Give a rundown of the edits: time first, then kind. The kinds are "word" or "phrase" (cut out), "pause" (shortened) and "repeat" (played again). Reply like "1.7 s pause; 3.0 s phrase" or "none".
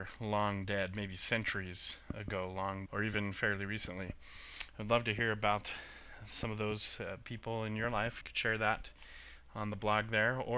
2.9 s word; 8.2 s word